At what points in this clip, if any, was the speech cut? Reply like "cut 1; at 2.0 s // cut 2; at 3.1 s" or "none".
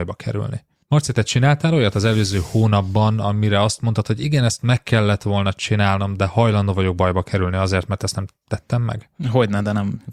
none